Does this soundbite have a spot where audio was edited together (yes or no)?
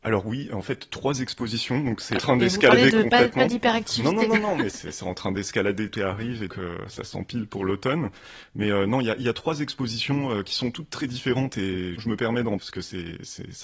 yes